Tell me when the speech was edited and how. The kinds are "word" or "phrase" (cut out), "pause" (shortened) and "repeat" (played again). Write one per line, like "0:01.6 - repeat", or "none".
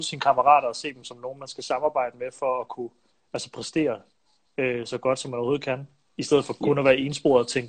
none